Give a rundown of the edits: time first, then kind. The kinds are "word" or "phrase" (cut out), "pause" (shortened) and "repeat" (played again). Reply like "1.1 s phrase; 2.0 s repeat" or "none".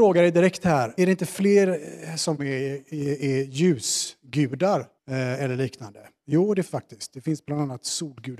1.0 s word; 2.4 s phrase; 5.0 s pause; 6.7 s word

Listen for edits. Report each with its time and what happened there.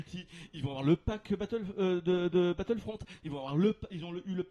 none

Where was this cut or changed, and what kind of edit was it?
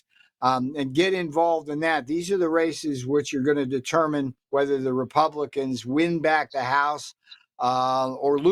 4.4 s pause

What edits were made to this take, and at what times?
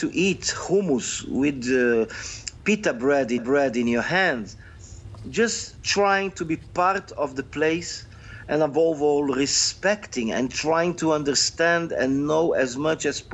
3.4 s repeat

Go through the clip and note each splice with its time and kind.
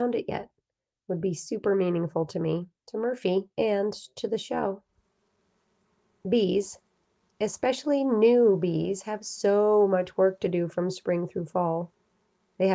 2.8 s pause; 3.5 s pause

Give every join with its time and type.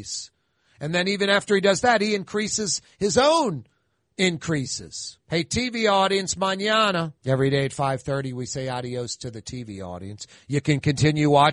5.2 s pause; 7.2 s pause

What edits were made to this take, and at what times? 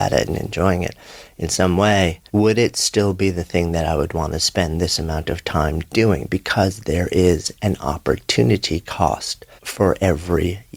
2.3 s pause; 9.6 s pause

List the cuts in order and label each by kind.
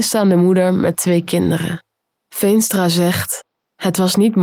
none

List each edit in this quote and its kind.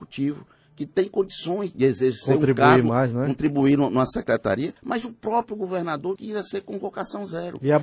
1.7 s word; 4.8 s pause; 6.2 s word

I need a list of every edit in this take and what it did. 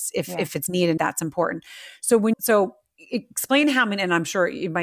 1.0 s word; 2.3 s word; 3.0 s pause

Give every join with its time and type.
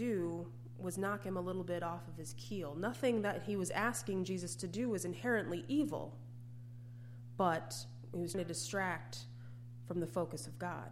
8.3 s word

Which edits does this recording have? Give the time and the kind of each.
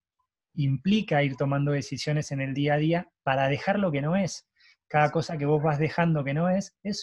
none

